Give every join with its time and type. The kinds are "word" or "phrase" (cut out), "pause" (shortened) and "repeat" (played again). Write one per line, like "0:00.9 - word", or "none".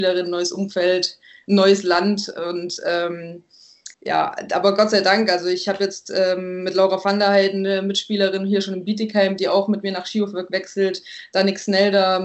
0:03.9 - pause